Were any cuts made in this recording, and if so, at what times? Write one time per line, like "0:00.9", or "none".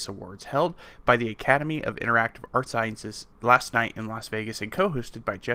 0:02.7
0:03.3